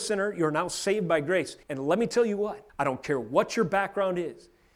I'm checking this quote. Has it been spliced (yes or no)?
yes